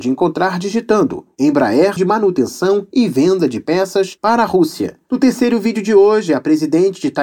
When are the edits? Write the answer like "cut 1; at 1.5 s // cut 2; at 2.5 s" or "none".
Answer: cut 1; at 2.0 s